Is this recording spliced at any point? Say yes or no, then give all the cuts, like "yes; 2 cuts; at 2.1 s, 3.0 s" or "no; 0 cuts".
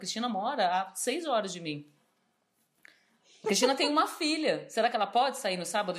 no; 0 cuts